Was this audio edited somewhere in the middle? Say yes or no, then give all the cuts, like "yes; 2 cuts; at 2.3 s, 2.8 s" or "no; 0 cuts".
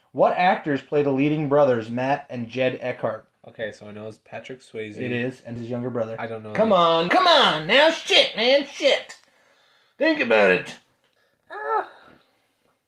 yes; 3 cuts; at 3.3 s, 5.6 s, 7.1 s